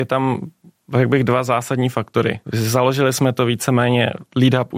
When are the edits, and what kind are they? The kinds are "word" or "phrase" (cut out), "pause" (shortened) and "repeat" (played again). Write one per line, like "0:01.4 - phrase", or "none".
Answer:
0:02.4 - pause